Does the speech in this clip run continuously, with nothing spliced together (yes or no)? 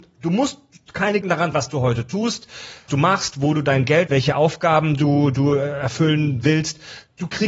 no